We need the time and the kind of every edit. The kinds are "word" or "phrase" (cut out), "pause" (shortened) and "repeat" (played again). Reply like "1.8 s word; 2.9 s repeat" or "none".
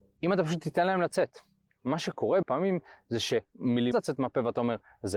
2.4 s word; 3.9 s word